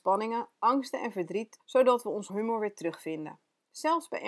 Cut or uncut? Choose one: cut